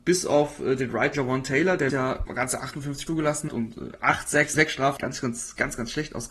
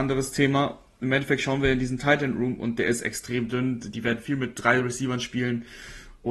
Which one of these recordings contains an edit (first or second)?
first